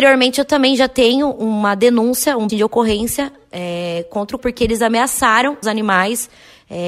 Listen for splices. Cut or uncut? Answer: cut